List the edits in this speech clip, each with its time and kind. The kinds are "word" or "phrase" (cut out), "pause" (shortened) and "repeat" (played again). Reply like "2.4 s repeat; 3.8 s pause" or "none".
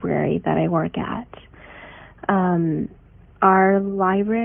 none